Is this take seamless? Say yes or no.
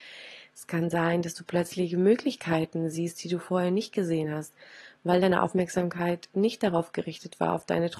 yes